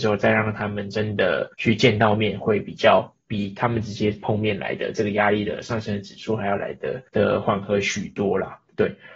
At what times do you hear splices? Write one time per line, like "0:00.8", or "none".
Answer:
0:01.5
0:07.1